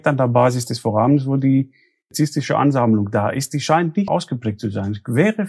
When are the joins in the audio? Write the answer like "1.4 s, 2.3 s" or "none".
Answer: 4.1 s